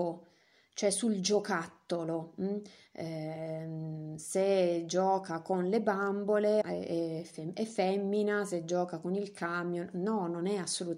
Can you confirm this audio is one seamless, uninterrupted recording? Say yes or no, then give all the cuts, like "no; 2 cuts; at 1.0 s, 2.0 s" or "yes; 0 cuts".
no; 1 cut; at 6.6 s